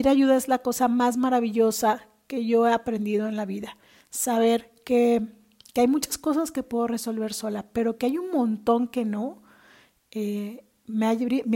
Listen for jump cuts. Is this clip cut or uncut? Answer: uncut